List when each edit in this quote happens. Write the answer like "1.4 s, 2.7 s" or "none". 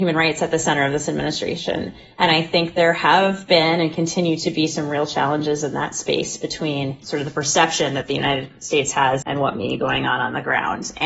9.2 s, 9.8 s